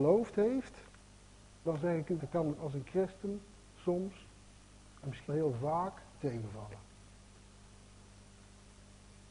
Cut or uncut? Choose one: cut